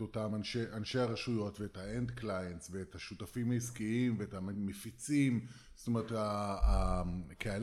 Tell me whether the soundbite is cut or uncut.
uncut